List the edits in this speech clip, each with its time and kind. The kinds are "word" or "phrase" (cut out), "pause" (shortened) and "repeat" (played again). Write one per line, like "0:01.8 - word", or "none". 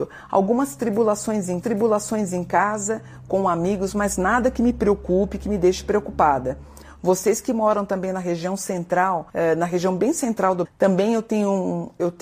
0:01.6 - repeat
0:10.6 - word